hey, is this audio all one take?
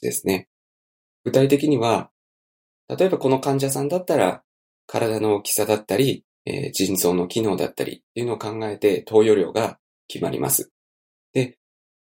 no; 1 cut; at 6.4 s

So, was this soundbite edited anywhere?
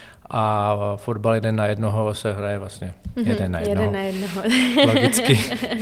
no; 0 cuts

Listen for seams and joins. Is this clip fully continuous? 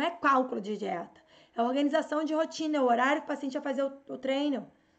yes; 0 cuts

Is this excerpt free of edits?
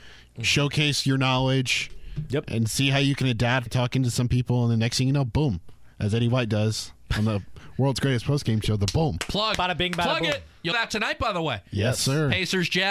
no; 3 cuts; at 3.7 s, 5.9 s, 10.7 s

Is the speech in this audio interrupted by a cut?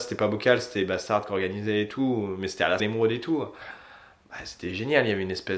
yes; 1 cut; at 2.8 s

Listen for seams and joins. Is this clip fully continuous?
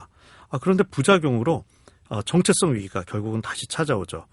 yes; 0 cuts

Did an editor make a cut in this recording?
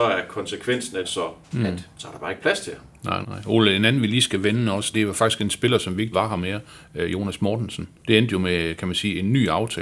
yes; 7 cuts; at 1.0 s, 1.4 s, 1.9 s, 3.2 s, 4.9 s, 6.1 s, 8.0 s

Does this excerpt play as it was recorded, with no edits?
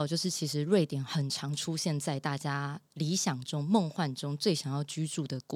yes; 0 cuts

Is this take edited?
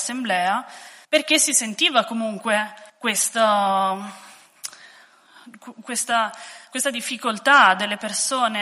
yes; 2 cuts; at 1.0 s, 2.9 s

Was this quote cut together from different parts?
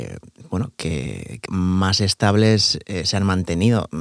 yes; 1 cut; at 1.5 s

